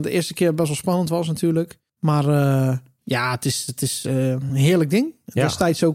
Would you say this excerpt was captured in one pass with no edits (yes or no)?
yes